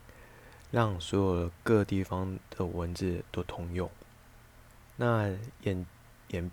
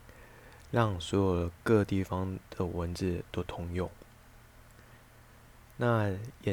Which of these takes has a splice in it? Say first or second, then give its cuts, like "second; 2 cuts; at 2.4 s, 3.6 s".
first; 1 cut; at 4.7 s